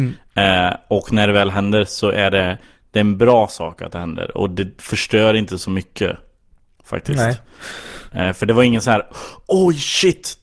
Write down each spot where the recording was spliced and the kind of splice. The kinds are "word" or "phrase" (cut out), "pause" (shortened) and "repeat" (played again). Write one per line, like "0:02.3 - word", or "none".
none